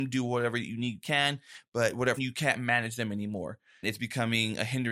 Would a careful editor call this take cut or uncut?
cut